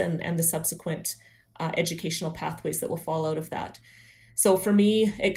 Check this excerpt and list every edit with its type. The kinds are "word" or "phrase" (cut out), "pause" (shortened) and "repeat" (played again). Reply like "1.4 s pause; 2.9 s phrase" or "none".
none